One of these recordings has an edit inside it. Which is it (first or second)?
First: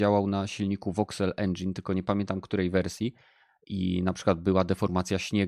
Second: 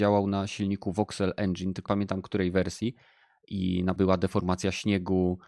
second